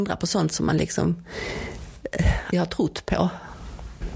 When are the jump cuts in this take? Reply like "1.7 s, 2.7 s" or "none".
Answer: 2.5 s